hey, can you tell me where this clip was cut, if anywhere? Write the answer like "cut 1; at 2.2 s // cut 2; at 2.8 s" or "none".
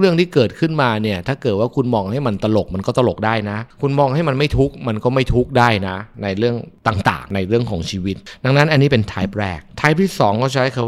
cut 1; at 9.7 s